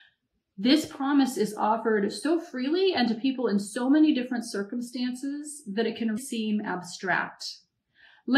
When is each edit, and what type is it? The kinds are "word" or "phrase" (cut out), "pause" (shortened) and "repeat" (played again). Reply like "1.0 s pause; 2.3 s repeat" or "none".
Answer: 6.2 s word

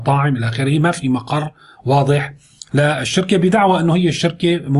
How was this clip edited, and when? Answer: none

